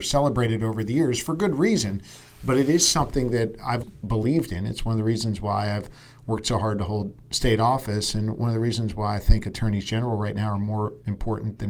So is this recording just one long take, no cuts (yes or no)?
no